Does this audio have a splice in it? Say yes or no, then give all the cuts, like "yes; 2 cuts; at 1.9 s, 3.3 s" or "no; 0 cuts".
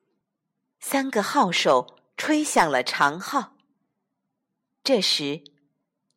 no; 0 cuts